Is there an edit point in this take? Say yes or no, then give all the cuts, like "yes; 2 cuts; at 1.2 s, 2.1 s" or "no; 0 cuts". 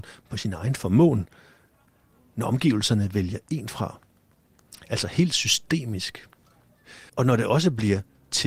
yes; 1 cut; at 7.1 s